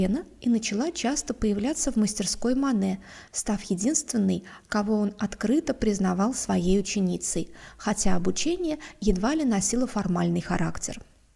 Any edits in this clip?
no; 0 cuts

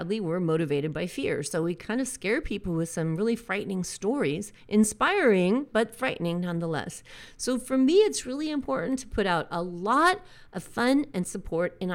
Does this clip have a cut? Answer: no; 0 cuts

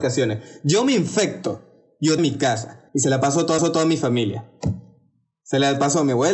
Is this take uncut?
no; 3 cuts; at 2.2 s, 2.9 s, 3.6 s

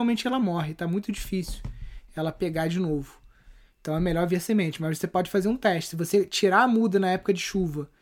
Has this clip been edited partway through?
no; 0 cuts

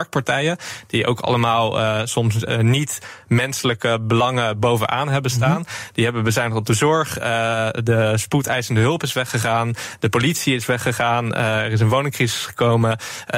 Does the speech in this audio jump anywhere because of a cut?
no; 0 cuts

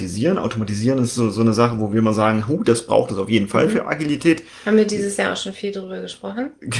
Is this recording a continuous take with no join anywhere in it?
yes; 0 cuts

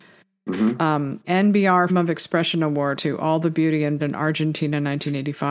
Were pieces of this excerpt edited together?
yes; 4 cuts; at 1.2 s, 1.9 s, 3.0 s, 4.0 s

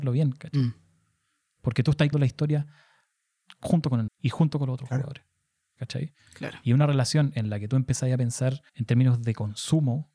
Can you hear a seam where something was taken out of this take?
yes; 3 cuts; at 2.1 s, 4.1 s, 8.7 s

